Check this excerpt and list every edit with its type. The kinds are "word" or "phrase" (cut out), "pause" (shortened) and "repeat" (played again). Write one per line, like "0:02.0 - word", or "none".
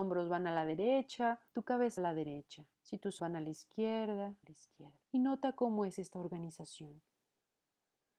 0:01.5 - pause
0:02.0 - word
0:02.7 - pause
0:03.2 - word
0:04.4 - phrase
0:05.0 - pause